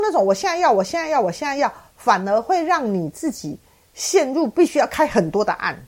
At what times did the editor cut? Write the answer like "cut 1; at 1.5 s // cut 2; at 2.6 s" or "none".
none